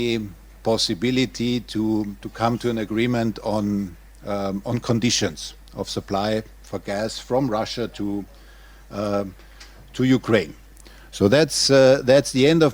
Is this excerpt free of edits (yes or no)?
yes